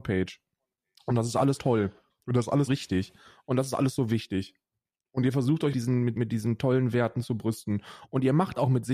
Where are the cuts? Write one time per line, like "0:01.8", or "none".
0:01.6
0:02.7
0:05.7
0:06.2